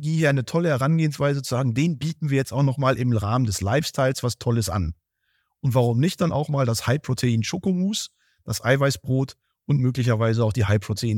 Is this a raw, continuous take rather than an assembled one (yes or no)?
yes